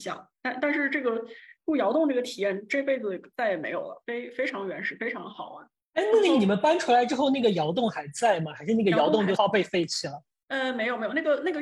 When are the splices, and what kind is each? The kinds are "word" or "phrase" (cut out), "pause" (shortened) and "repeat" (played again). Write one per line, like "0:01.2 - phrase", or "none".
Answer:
0:09.3 - word